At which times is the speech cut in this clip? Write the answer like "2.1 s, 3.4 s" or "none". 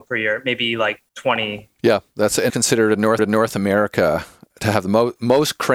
1.1 s, 2.5 s, 3.2 s